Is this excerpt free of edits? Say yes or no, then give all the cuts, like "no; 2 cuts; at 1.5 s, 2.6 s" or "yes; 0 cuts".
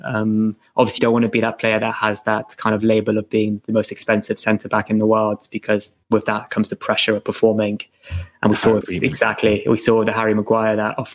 no; 3 cuts; at 1.0 s, 6.0 s, 8.8 s